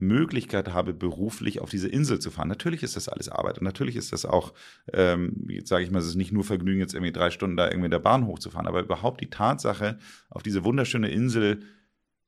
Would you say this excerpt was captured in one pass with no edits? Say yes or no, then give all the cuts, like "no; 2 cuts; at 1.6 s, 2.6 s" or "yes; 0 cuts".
yes; 0 cuts